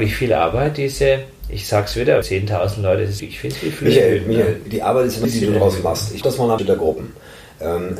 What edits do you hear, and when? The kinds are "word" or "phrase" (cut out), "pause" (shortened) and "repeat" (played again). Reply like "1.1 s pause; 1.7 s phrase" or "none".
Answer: 2.2 s word; 3.2 s word; 4.7 s word; 5.2 s word; 6.2 s word; 6.6 s word